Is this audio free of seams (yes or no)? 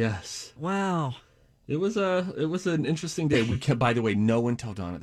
yes